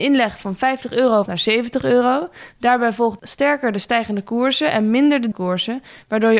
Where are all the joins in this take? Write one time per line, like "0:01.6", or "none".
0:01.3
0:03.2
0:05.3

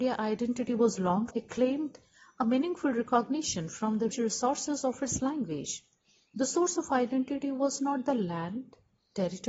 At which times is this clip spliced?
0:01.3
0:04.1

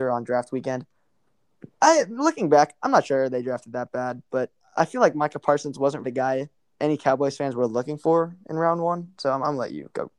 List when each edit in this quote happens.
0:06.0
0:06.6

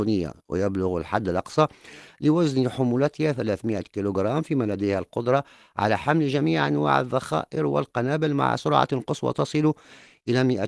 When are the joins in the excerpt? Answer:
none

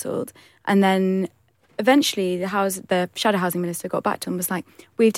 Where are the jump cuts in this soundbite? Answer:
0:04.2

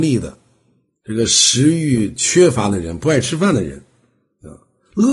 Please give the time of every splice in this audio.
none

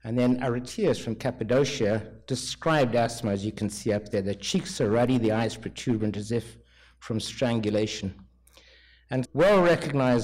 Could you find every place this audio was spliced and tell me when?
0:09.2

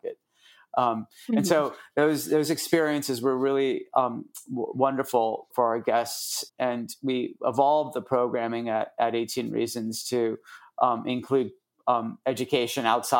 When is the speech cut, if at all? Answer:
0:05.5
0:06.5

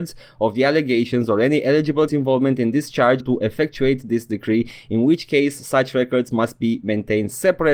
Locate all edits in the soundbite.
0:02.1
0:03.2

